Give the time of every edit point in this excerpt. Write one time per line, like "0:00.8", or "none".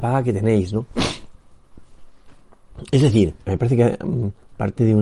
0:03.4